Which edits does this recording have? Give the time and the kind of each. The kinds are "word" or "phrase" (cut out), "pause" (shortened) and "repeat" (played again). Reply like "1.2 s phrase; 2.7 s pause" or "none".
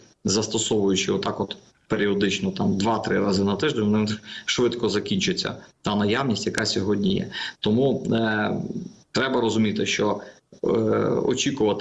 none